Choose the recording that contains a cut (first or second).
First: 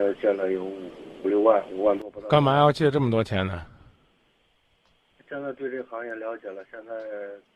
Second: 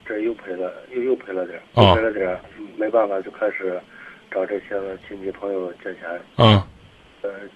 second